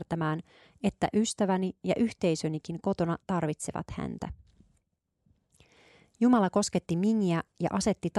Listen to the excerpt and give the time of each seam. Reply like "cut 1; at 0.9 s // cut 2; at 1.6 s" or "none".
none